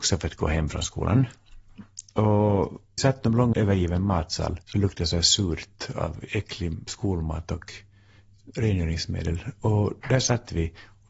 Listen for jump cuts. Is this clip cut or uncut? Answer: cut